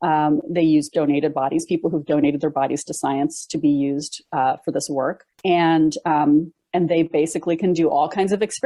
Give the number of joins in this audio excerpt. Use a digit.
1